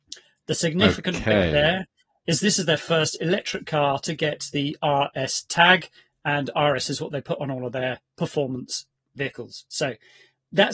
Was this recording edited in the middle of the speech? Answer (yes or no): no